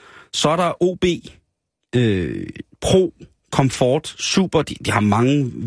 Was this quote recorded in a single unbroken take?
yes; 0 cuts

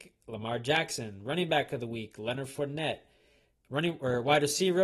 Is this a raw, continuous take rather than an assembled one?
yes; 0 cuts

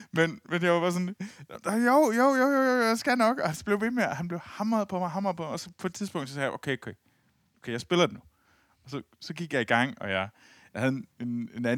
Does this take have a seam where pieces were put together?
no; 0 cuts

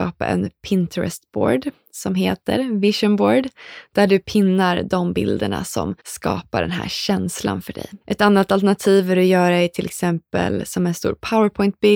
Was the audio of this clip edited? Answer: yes; 2 cuts; at 6.0 s, 8.0 s

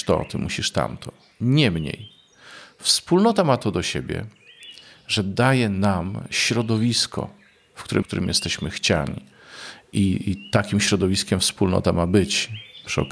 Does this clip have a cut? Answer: yes; 1 cut; at 8.0 s

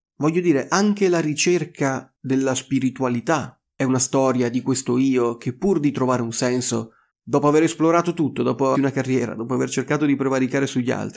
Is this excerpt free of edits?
no; 2 cuts; at 7.1 s, 8.7 s

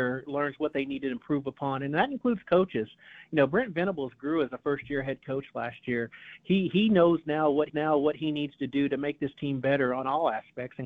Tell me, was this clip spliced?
yes; 1 cut; at 7.7 s

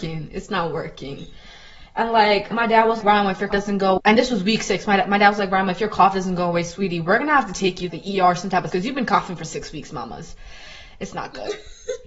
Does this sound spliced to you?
yes; 6 cuts; at 2.5 s, 3.0 s, 3.5 s, 4.0 s, 7.9 s, 8.7 s

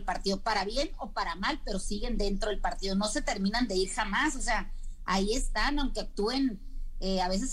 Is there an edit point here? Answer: no; 0 cuts

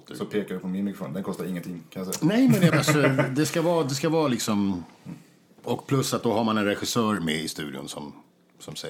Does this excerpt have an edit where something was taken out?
yes; 1 cut; at 2.7 s

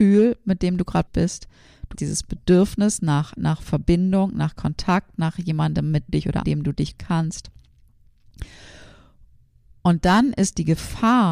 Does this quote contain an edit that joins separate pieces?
yes; 6 cuts; at 1.1 s, 1.9 s, 3.4 s, 6.1 s, 6.4 s, 7.0 s

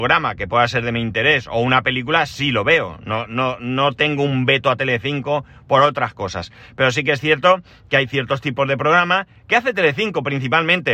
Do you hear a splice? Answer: no; 0 cuts

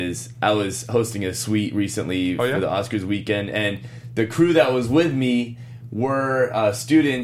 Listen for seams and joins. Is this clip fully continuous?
yes; 0 cuts

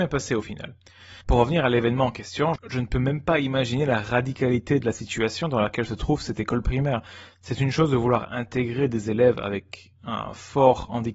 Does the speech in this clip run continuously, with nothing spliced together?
no; 1 cut; at 1.2 s

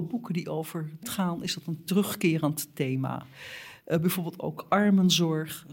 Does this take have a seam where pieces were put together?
yes; 1 cut; at 1.0 s

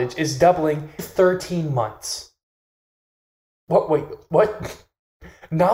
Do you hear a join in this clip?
yes; 1 cut; at 1.0 s

